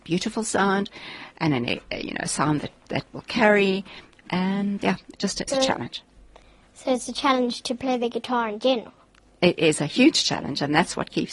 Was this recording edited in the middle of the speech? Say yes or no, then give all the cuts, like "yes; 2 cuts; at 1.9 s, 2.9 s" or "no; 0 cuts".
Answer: yes; 2 cuts; at 4.8 s, 5.5 s